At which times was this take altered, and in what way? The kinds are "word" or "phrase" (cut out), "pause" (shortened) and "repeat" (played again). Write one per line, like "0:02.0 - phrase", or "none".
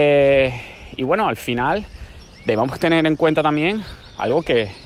none